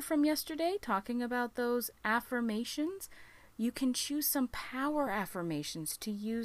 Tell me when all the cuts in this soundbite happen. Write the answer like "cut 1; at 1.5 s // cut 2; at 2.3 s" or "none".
none